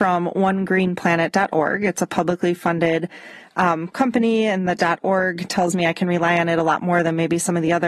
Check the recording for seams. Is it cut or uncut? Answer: uncut